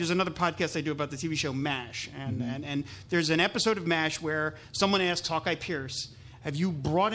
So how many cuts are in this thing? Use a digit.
0